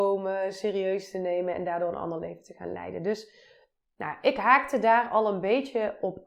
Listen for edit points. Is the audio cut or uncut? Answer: uncut